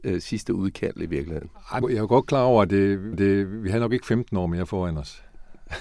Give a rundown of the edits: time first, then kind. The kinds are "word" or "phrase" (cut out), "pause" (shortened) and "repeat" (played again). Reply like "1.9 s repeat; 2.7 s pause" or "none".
1.8 s word; 3.1 s repeat